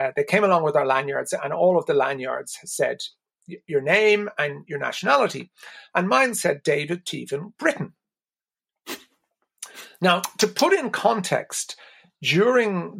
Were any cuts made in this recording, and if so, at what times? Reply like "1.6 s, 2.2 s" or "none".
7.6 s